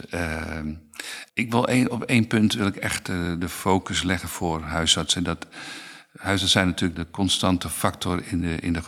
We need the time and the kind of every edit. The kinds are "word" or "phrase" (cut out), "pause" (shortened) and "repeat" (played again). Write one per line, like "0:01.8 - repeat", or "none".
0:01.3 - pause
0:06.9 - word